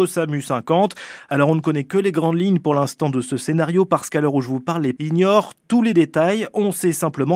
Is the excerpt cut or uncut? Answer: cut